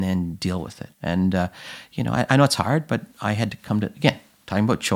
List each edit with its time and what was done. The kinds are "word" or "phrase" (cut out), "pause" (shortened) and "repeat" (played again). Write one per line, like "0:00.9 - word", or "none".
0:00.9 - pause